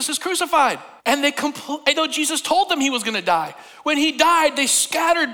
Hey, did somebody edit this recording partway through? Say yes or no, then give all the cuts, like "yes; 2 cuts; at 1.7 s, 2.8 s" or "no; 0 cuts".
yes; 2 cuts; at 1.0 s, 1.9 s